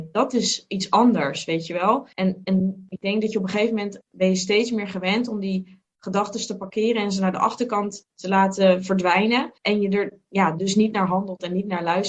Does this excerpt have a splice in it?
yes; 2 cuts; at 2.1 s, 9.6 s

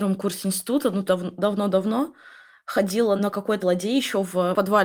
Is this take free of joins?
no; 3 cuts; at 1.1 s, 3.2 s, 3.6 s

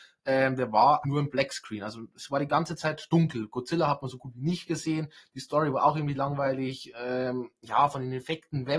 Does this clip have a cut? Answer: yes; 1 cut; at 1.0 s

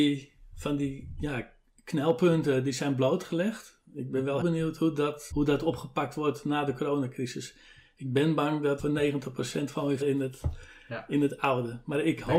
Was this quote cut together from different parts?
yes; 4 cuts; at 4.4 s, 5.3 s, 8.8 s, 10.0 s

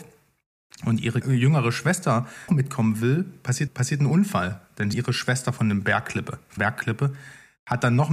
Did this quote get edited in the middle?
yes; 5 cuts; at 1.2 s, 2.5 s, 3.7 s, 4.9 s, 6.6 s

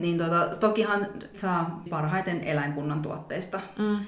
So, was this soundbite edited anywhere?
yes; 2 cuts; at 1.3 s, 1.9 s

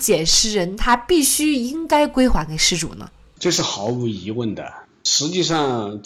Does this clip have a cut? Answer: no; 0 cuts

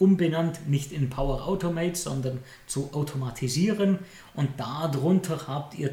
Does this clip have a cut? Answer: no; 0 cuts

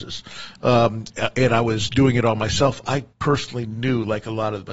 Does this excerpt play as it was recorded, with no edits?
no; 1 cut; at 3.1 s

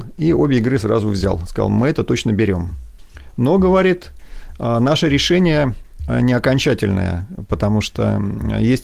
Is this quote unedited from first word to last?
yes; 0 cuts

